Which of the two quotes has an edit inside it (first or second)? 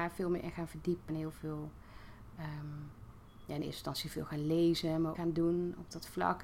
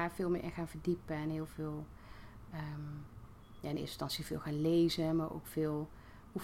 first